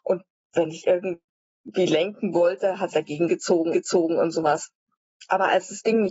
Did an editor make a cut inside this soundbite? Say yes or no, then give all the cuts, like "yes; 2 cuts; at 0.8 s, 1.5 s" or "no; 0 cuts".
yes; 2 cuts; at 2.9 s, 3.7 s